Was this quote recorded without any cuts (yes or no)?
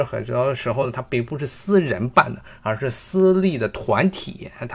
yes